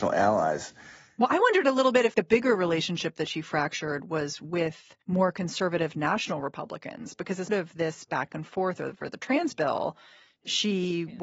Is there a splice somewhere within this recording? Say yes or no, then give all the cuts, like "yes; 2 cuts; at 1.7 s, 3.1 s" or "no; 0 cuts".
yes; 3 cuts; at 2.1 s, 5.0 s, 7.5 s